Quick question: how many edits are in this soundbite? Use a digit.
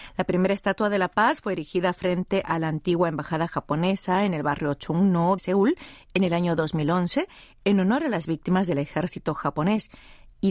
1